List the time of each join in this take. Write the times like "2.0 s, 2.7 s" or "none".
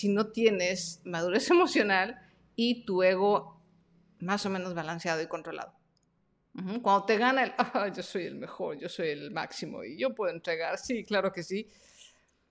none